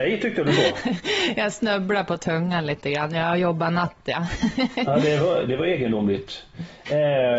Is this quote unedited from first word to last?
yes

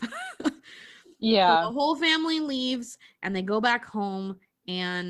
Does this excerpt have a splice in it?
no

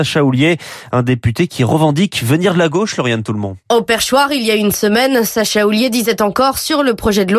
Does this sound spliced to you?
yes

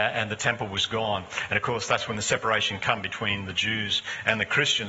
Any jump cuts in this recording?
no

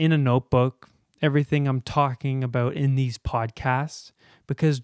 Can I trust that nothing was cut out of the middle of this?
yes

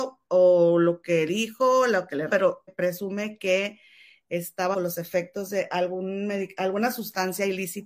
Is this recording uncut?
no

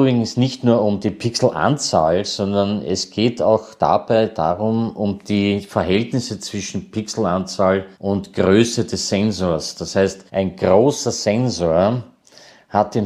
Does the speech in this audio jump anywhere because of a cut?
yes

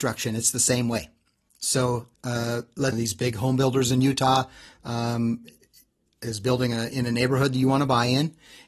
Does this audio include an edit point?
yes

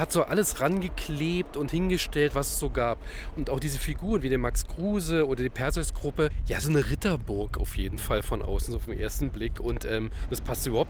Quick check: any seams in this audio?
yes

